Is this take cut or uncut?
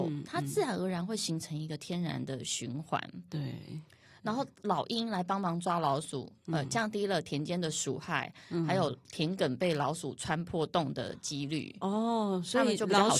uncut